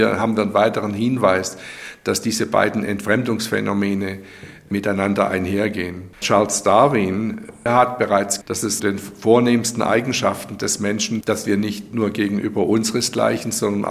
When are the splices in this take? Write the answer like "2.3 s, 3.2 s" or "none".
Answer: 6.1 s, 8.4 s, 8.8 s, 11.2 s